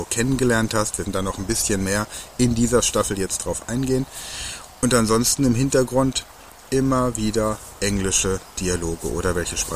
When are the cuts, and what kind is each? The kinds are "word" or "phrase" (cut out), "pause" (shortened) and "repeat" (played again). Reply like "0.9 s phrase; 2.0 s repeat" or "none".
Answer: 1.0 s word